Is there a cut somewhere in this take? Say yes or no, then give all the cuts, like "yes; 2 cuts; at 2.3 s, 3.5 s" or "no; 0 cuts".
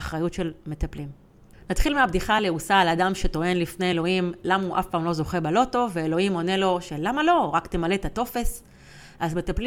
no; 0 cuts